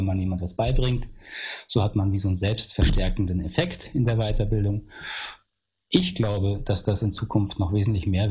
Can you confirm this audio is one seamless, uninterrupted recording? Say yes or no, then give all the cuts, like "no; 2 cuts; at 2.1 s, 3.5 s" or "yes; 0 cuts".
yes; 0 cuts